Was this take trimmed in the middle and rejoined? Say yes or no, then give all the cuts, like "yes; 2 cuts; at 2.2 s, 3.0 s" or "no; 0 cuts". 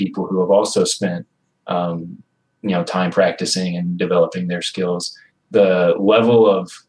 no; 0 cuts